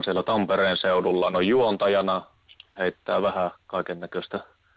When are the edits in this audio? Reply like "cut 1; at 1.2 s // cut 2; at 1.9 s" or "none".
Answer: cut 1; at 1.3 s // cut 2; at 2.8 s